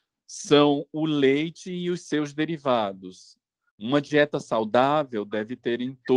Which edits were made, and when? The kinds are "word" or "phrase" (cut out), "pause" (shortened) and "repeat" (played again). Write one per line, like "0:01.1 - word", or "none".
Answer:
none